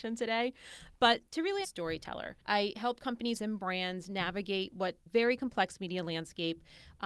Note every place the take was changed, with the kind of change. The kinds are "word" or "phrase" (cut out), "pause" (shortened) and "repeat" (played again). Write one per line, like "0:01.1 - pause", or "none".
0:01.6 - phrase
0:02.4 - pause
0:03.4 - word
0:05.1 - phrase